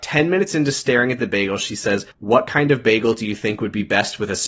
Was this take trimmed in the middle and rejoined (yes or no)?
yes